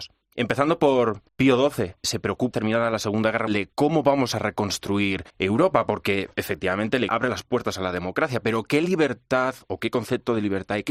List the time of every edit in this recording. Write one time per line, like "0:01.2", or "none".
0:01.3
0:02.0
0:02.5
0:03.5
0:05.3
0:07.1